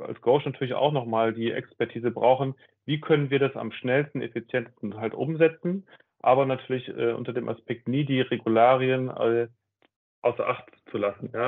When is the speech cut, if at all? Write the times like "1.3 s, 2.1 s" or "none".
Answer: none